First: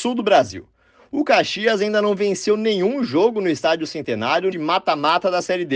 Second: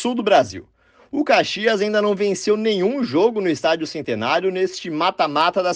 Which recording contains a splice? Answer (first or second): first